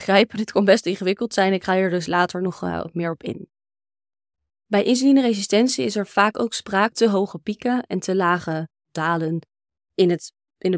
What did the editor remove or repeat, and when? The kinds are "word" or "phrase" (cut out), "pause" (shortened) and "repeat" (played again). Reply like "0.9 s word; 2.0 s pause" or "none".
6.9 s phrase